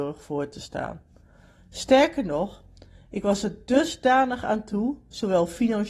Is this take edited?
no; 0 cuts

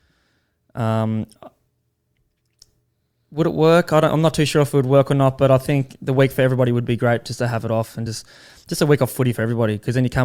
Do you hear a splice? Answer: no; 0 cuts

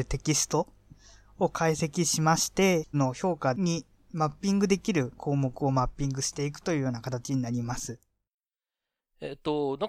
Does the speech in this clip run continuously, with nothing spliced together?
no; 1 cut; at 2.9 s

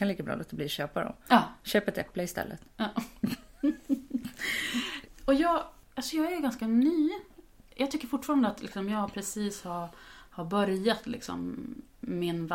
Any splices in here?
no; 0 cuts

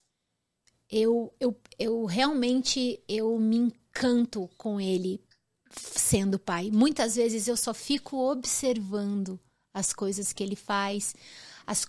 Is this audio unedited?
no; 1 cut; at 1.4 s

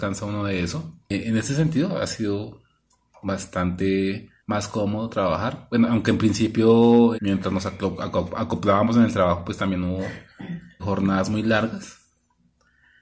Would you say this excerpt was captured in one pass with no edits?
no; 4 cuts; at 1.0 s, 4.4 s, 7.1 s, 10.8 s

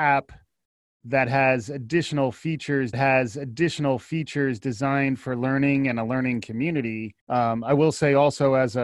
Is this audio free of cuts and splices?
no; 2 cuts; at 2.9 s, 7.2 s

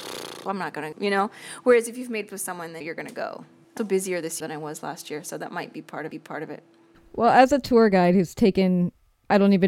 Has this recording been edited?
yes; 5 cuts; at 0.9 s, 2.3 s, 3.8 s, 4.4 s, 6.1 s

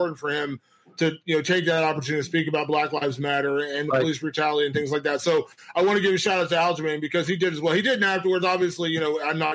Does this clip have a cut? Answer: no; 0 cuts

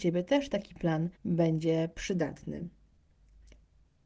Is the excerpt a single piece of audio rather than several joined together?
no; 1 cut; at 1.2 s

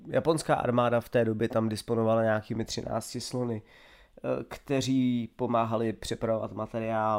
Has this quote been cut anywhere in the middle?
no; 0 cuts

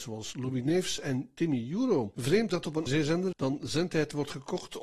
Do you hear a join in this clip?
yes; 3 cuts; at 2.5 s, 2.9 s, 3.3 s

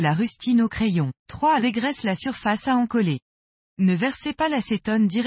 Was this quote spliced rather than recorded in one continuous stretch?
yes; 2 cuts; at 1.2 s, 1.6 s

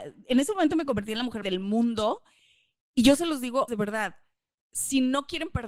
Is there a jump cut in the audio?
yes; 2 cuts; at 1.4 s, 3.7 s

